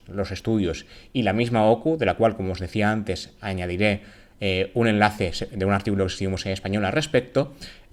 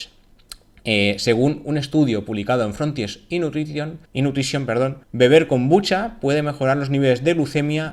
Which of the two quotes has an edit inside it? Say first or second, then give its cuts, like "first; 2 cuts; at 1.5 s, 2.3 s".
second; 2 cuts; at 4.1 s, 5.0 s